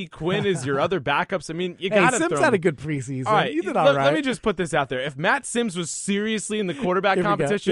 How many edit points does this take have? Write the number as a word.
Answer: zero